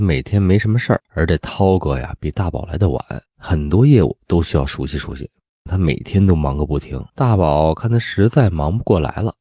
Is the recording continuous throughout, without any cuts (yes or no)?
no